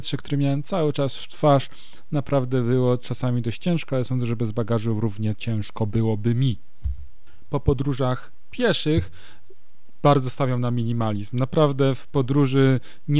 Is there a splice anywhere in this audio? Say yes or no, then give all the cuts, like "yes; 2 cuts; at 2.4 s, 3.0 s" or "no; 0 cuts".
no; 0 cuts